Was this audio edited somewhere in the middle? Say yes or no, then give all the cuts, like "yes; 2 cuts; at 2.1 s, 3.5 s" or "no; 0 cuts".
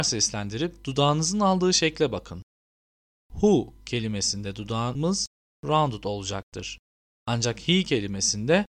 no; 0 cuts